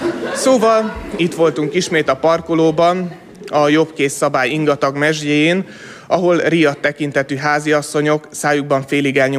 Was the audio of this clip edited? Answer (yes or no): no